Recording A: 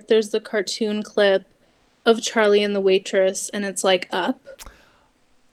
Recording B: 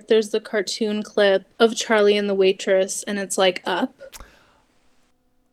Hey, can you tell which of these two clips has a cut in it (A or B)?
B